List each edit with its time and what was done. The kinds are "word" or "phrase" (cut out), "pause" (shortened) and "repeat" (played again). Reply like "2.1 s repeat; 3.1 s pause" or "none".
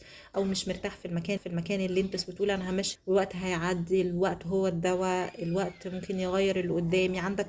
1.4 s repeat; 2.1 s word; 2.9 s word